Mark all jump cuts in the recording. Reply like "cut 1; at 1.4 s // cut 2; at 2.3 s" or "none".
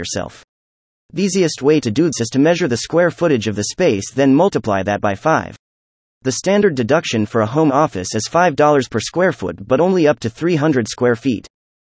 cut 1; at 2.1 s